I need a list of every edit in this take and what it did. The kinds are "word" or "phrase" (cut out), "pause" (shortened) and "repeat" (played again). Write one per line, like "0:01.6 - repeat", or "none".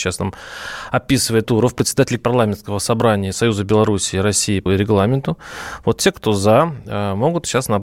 0:01.4 - word
0:02.2 - word
0:04.7 - word